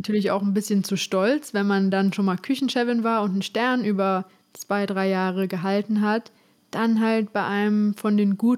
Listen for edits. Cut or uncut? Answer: uncut